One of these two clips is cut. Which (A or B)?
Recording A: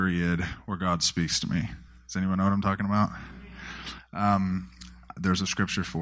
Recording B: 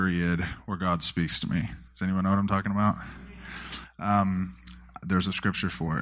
B